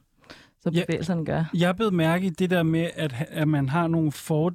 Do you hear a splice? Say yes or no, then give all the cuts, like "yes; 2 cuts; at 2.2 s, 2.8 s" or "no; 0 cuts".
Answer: no; 0 cuts